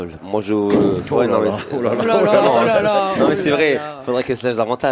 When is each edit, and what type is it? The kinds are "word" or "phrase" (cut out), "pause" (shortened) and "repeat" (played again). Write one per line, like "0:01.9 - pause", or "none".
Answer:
none